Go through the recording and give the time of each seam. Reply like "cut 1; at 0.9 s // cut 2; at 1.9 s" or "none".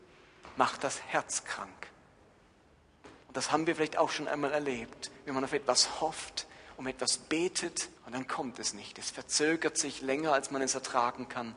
cut 1; at 3.2 s // cut 2; at 8.0 s